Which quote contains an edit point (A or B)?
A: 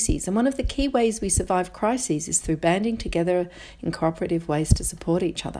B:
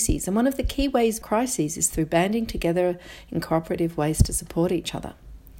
B